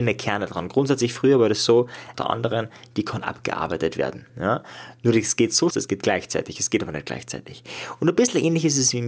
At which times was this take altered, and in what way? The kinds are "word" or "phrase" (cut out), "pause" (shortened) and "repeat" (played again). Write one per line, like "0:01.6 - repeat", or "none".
0:02.1 - phrase
0:04.3 - pause
0:05.7 - phrase

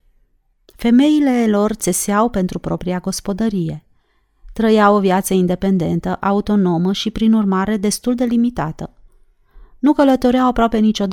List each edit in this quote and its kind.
none

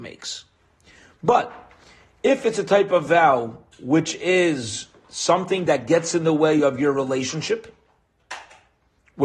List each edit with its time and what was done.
none

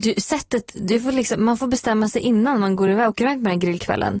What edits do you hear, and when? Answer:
none

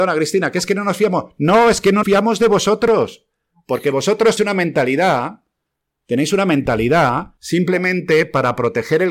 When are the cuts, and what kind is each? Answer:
0:02.0 - word
0:04.4 - word
0:07.4 - pause

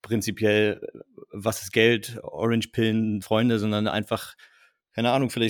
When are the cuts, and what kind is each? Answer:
0:03.2 - word

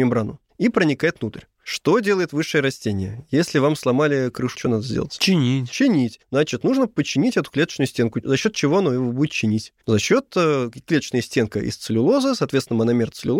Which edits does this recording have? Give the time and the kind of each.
0:04.5 - word
0:06.2 - pause
0:09.8 - pause

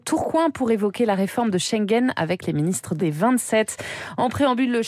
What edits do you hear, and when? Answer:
0:03.0 - word

